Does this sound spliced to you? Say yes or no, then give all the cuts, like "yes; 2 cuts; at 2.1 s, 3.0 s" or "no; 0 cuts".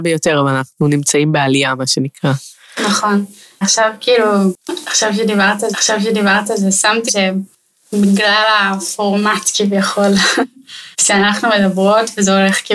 yes; 4 cuts; at 3.6 s, 5.7 s, 7.1 s, 10.9 s